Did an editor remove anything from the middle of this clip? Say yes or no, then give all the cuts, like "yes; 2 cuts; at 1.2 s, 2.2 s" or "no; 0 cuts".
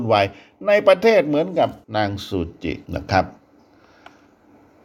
yes; 2 cuts; at 1.8 s, 2.9 s